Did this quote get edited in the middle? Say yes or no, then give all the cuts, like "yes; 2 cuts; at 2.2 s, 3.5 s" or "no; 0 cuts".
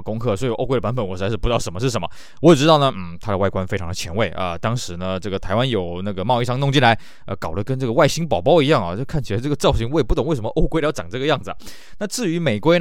no; 0 cuts